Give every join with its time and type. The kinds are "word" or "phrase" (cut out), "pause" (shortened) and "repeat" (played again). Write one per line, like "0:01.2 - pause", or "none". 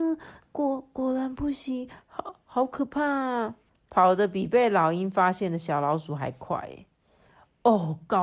0:03.7 - pause